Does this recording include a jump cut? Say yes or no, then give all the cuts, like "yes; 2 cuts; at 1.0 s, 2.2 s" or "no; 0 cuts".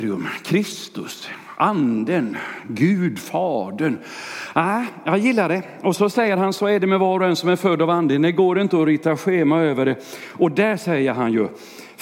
no; 0 cuts